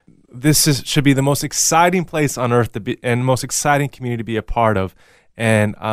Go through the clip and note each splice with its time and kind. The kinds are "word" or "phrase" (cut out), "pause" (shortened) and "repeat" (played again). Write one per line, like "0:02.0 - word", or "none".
none